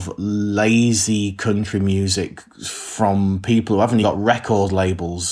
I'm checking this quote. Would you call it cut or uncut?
cut